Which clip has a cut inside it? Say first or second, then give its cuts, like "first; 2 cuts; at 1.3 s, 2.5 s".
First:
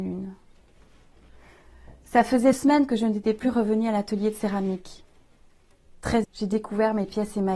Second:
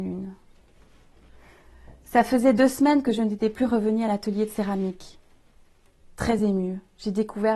first; 2 cuts; at 2.5 s, 6.2 s